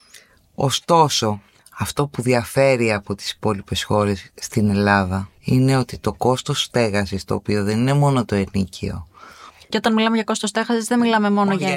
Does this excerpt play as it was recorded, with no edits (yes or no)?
no